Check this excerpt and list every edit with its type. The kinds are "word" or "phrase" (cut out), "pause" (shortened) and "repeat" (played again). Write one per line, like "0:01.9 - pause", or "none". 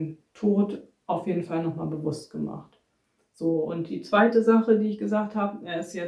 none